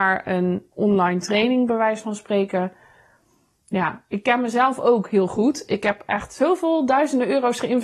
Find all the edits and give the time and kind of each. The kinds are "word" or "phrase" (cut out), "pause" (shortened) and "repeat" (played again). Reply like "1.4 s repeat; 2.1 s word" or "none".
none

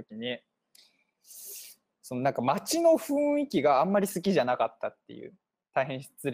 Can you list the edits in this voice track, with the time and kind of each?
none

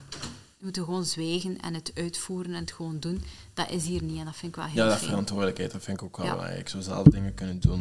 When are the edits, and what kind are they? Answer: none

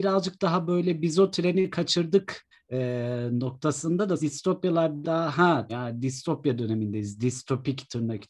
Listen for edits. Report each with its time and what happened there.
2.5 s pause; 4.2 s word; 5.0 s word; 5.7 s word

